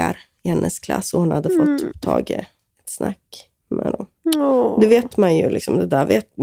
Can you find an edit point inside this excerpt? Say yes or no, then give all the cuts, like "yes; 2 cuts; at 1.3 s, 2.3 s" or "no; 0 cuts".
yes; 1 cut; at 3.6 s